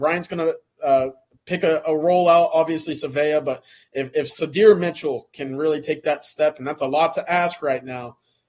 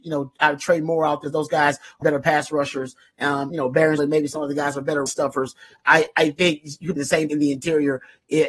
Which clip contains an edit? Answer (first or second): second